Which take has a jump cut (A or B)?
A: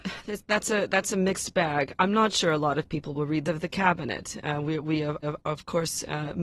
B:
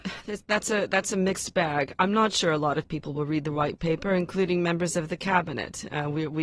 A